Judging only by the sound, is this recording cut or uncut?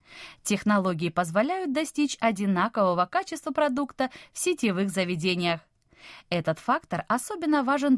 uncut